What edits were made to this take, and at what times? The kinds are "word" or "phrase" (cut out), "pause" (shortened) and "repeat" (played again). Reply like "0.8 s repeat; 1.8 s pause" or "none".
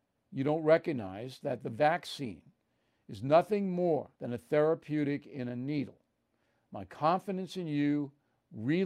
4.2 s pause